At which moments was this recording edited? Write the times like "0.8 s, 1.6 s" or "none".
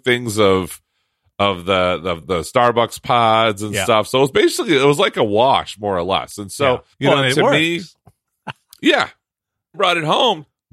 2.2 s, 6.9 s, 9.7 s

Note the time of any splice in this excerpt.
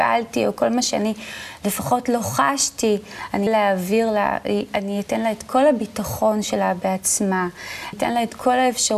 3.5 s, 7.9 s

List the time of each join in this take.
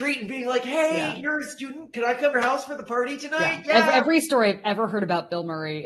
2.3 s

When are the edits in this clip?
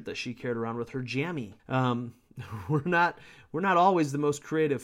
1.6 s

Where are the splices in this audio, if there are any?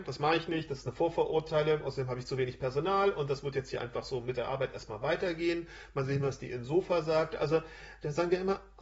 none

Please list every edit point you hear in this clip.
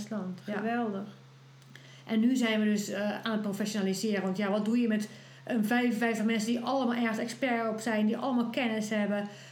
none

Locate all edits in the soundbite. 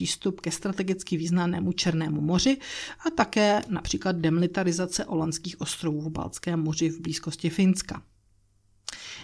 none

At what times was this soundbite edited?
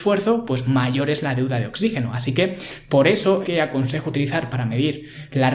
3.4 s

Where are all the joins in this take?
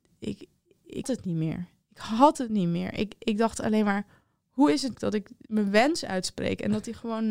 1.0 s, 4.9 s

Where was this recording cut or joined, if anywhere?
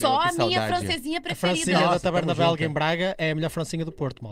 none

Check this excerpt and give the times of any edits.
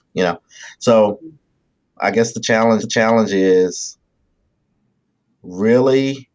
2.0 s, 2.8 s

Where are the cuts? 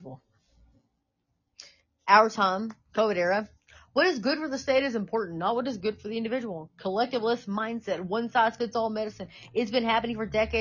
none

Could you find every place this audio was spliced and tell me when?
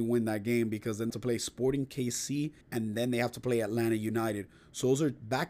1.1 s, 2.6 s

